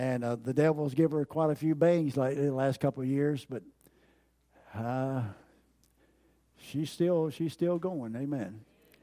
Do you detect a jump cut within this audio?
no; 0 cuts

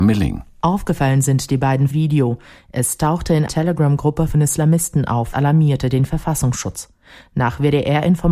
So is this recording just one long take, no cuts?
no; 4 cuts; at 1.9 s, 3.5 s, 4.3 s, 5.3 s

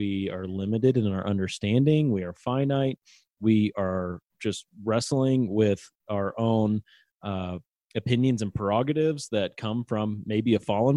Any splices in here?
no; 0 cuts

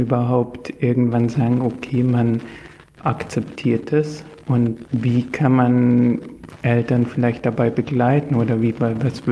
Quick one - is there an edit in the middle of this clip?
no; 0 cuts

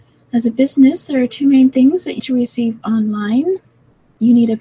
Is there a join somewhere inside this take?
yes; 2 cuts; at 2.2 s, 2.8 s

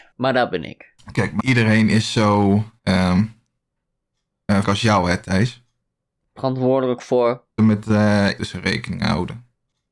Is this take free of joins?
no; 5 cuts; at 1.4 s, 2.8 s, 4.6 s, 7.6 s, 8.4 s

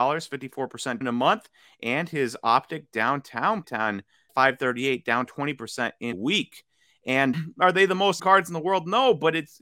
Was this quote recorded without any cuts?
no; 6 cuts; at 1.0 s, 3.6 s, 4.3 s, 6.1 s, 7.3 s, 8.2 s

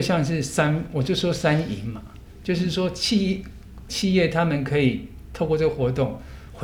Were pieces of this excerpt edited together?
yes; 1 cut; at 3.9 s

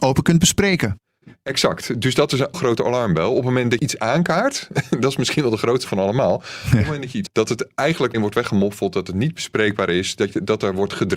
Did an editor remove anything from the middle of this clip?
yes; 5 cuts; at 2.5 s, 3.8 s, 5.8 s, 7.3 s, 8.1 s

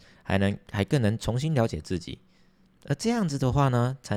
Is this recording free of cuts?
yes; 0 cuts

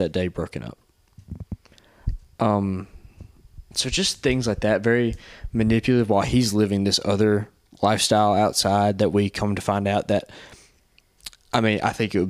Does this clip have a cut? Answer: no; 0 cuts

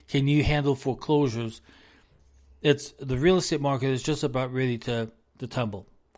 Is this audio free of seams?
yes; 0 cuts

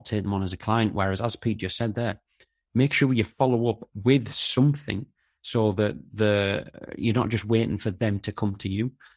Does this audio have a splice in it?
no; 0 cuts

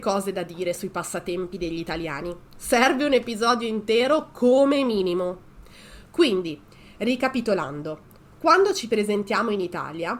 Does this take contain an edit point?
no; 0 cuts

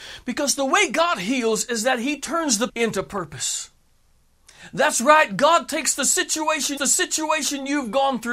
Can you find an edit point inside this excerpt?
yes; 2 cuts; at 2.7 s, 6.8 s

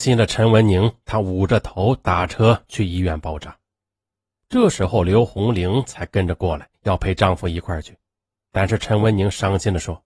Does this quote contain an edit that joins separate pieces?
yes; 1 cut; at 6.7 s

